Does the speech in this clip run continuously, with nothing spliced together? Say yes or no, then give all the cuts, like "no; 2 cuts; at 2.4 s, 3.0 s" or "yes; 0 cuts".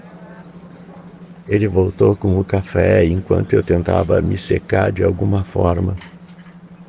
yes; 0 cuts